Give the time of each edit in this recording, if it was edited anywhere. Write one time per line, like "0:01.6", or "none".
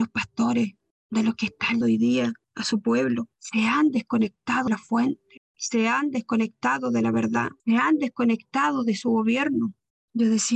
0:01.8
0:02.4
0:03.3
0:04.7
0:07.6

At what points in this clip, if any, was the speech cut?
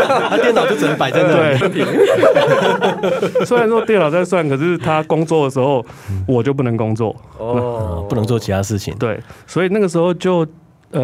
0:01.6

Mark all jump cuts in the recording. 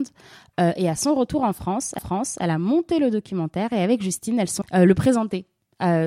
0:02.0
0:04.6

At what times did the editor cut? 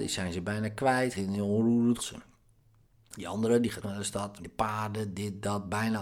0:01.1
0:02.0
0:03.8
0:04.4

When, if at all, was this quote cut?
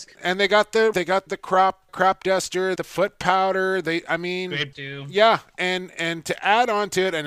0:00.9
0:01.3
0:01.9
0:02.8
0:04.7

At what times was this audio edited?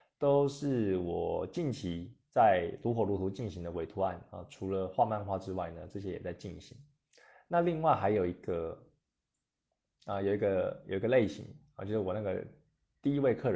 none

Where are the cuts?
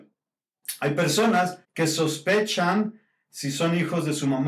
0:01.6

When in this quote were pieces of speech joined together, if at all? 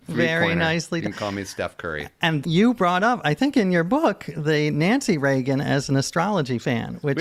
none

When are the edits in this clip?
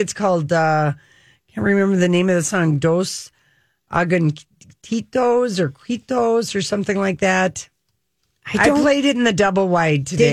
none

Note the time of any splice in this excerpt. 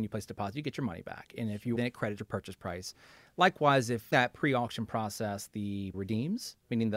0:01.7
0:02.2
0:04.1
0:05.9

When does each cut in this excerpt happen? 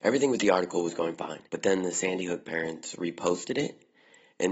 0:01.5

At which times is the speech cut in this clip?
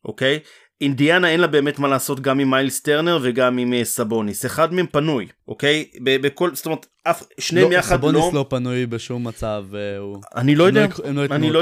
0:05.4

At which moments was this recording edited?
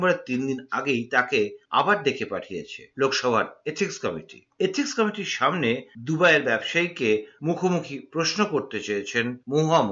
none

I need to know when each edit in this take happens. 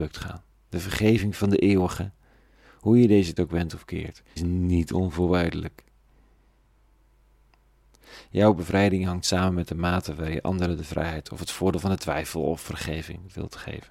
0:03.4
0:04.4

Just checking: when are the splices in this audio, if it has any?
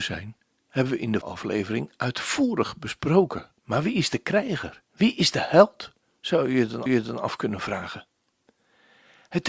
0:01.2
0:03.6
0:04.8
0:06.0
0:06.9

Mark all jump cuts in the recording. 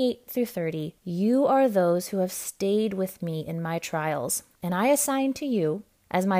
0:01.0

